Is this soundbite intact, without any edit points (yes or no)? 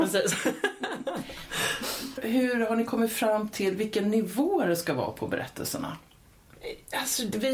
yes